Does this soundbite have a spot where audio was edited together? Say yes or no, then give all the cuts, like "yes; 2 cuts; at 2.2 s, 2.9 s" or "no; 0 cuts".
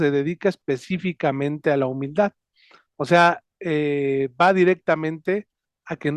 no; 0 cuts